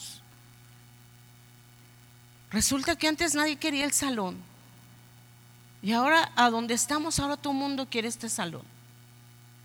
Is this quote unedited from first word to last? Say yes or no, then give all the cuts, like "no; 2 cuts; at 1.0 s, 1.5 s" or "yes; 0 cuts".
yes; 0 cuts